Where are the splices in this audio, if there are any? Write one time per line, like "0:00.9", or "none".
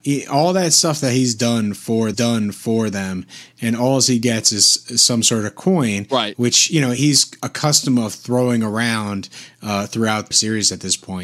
0:02.1
0:10.3

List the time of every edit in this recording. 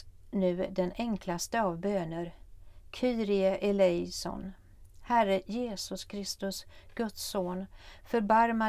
none

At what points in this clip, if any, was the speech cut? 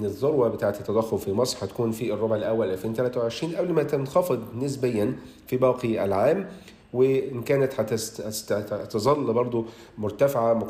none

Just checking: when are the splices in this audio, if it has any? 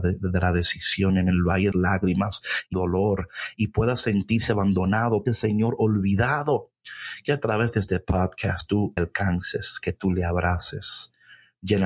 0:01.7
0:02.7
0:05.3
0:09.0

